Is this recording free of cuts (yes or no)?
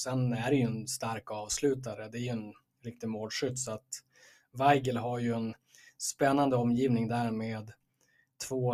yes